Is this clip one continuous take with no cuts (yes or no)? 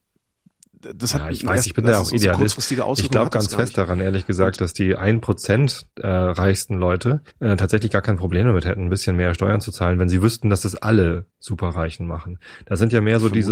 no